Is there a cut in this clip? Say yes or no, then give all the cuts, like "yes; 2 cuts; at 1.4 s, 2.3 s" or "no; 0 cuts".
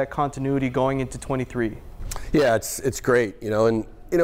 no; 0 cuts